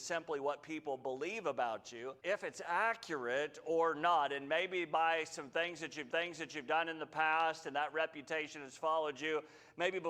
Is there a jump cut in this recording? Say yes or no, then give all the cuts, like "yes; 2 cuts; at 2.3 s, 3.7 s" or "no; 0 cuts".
yes; 2 cuts; at 2.2 s, 6.1 s